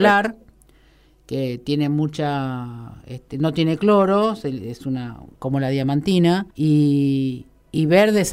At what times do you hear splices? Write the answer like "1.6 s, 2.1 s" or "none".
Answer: 6.5 s